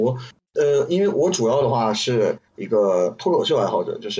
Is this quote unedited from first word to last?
no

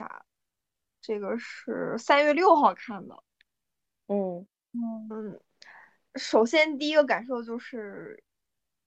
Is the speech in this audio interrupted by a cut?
yes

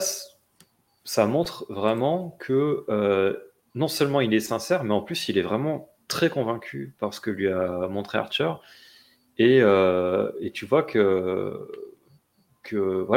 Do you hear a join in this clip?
no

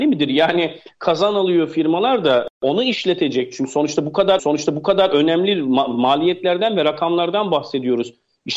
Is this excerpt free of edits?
no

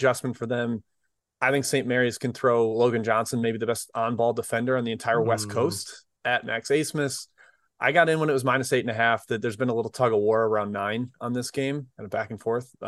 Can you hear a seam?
no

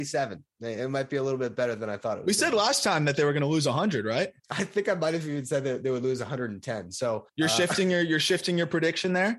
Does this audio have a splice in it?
yes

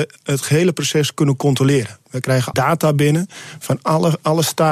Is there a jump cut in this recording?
yes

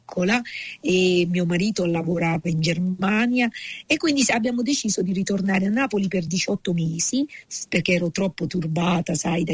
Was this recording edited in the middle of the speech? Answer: no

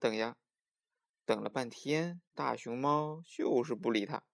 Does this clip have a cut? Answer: yes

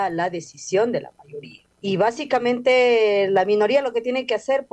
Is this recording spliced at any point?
yes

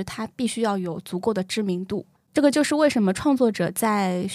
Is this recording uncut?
no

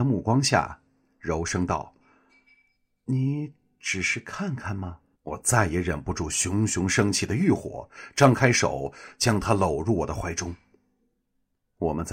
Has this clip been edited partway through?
yes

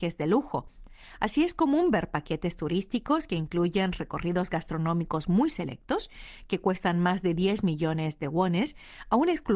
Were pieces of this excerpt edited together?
no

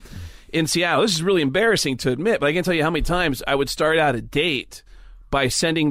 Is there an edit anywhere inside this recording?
no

